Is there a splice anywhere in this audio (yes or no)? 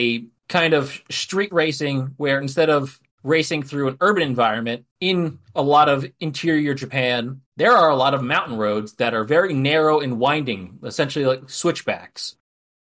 yes